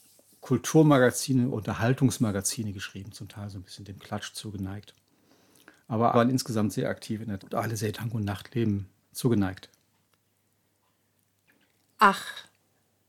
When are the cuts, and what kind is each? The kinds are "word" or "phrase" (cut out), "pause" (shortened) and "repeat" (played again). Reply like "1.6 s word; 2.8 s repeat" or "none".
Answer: 1.5 s word; 6.1 s word; 7.4 s word; 7.9 s word